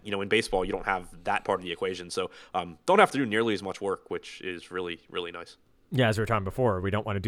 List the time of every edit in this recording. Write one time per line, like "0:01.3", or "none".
none